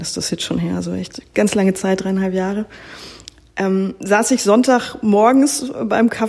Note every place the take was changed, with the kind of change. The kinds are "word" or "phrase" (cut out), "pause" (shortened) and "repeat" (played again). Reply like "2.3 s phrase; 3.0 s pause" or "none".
1.3 s word